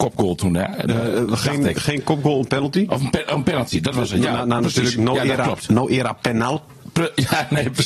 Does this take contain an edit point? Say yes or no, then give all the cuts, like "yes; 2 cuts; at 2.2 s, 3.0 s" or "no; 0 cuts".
no; 0 cuts